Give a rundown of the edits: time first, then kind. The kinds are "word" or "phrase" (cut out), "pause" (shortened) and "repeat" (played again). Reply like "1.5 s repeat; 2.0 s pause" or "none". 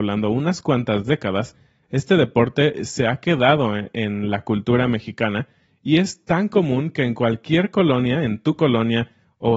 none